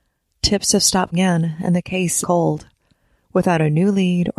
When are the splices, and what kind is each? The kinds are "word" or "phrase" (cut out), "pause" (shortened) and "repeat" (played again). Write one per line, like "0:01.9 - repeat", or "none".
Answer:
0:01.1 - word
0:02.2 - word